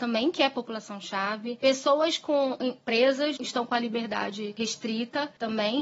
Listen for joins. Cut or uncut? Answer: cut